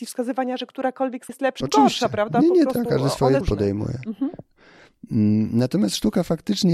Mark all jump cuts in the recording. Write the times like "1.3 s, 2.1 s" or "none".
1.3 s, 1.6 s, 2.9 s, 3.4 s